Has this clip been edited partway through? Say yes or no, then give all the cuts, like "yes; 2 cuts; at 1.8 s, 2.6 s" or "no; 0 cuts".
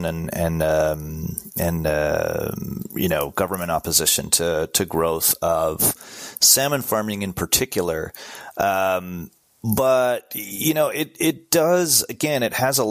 no; 0 cuts